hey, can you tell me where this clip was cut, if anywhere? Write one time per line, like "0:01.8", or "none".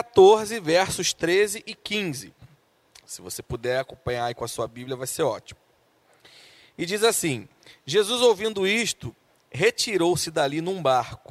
none